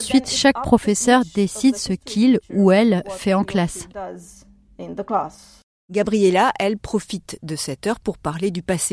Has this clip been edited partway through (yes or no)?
no